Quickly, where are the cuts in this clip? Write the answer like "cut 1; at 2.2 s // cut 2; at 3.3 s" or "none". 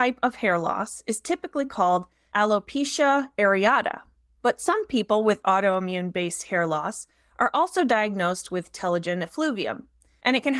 none